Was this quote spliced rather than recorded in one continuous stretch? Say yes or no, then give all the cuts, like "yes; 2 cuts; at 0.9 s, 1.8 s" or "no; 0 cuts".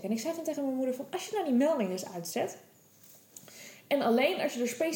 no; 0 cuts